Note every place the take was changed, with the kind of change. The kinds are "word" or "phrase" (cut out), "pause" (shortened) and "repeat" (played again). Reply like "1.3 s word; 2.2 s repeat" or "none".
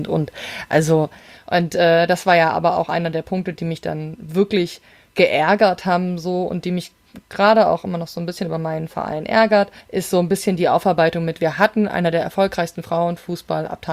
9.8 s pause